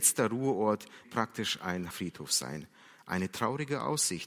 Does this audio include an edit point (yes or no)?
yes